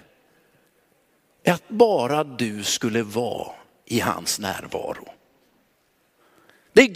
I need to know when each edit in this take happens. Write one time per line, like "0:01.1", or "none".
none